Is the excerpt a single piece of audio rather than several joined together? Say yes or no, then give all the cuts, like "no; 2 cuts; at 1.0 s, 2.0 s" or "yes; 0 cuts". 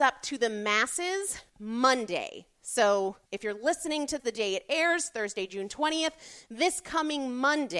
no; 3 cuts; at 1.5 s, 3.3 s, 4.2 s